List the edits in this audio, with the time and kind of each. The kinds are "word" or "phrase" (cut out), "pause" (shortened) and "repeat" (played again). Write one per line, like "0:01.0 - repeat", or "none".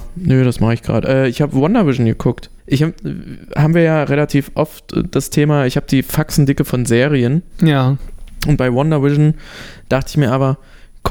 0:02.6 - pause